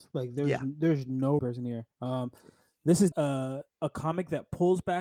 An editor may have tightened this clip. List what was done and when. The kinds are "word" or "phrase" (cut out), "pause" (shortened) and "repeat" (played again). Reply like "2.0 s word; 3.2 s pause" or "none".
1.4 s phrase; 1.9 s pause; 3.1 s word; 3.7 s pause